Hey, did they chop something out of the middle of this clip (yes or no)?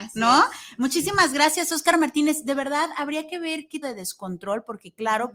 yes